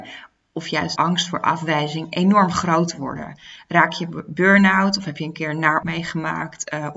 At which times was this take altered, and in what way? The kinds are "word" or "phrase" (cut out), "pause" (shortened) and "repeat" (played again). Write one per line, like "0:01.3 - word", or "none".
0:01.0 - word
0:05.8 - word